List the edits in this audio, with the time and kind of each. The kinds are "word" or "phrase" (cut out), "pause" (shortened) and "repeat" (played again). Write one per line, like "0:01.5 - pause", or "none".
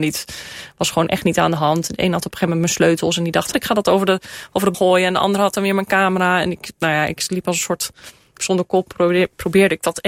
0:03.5 - word
0:04.7 - word
0:08.4 - word